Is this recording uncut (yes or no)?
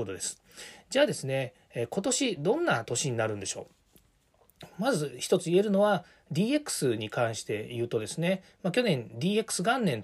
yes